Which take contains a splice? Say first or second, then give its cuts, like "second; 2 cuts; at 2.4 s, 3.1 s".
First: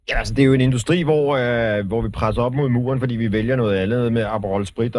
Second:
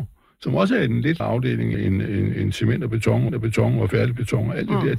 second; 3 cuts; at 1.2 s, 1.7 s, 3.3 s